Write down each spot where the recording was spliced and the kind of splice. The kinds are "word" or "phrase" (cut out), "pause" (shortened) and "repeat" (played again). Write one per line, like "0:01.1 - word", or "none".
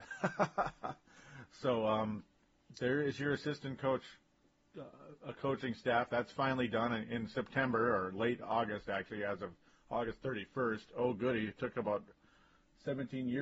none